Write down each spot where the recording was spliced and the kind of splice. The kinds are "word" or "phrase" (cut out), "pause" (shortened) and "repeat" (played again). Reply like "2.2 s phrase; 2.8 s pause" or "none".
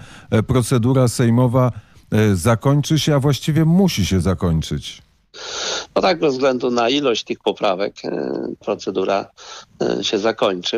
8.6 s word